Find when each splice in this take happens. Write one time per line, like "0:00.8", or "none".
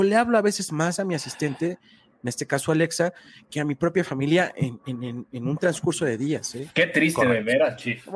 none